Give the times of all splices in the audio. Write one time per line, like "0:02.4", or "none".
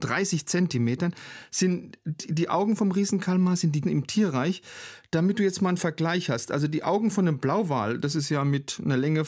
0:03.8